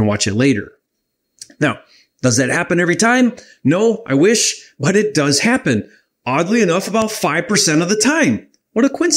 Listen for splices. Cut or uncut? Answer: uncut